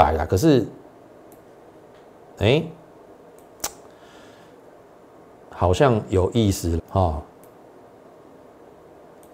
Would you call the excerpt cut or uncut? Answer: cut